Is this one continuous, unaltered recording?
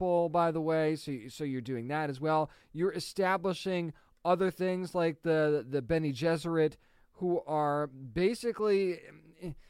yes; 0 cuts

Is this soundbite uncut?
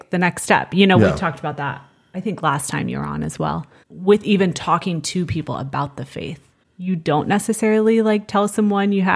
yes; 0 cuts

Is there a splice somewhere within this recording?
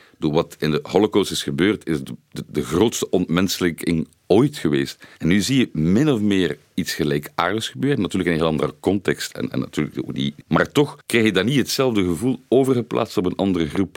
yes; 1 cut; at 5.1 s

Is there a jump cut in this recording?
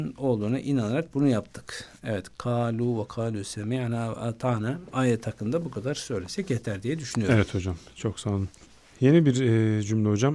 no; 0 cuts

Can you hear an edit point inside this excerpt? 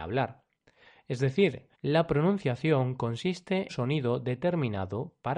yes; 2 cuts; at 1.7 s, 3.7 s

